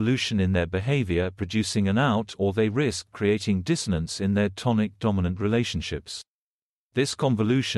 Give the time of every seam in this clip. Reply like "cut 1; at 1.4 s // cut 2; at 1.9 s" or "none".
none